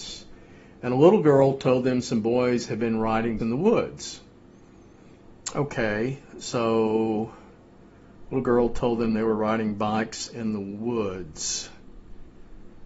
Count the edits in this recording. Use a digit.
1